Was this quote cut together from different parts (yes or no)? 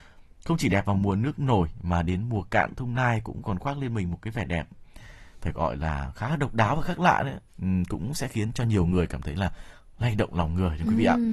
yes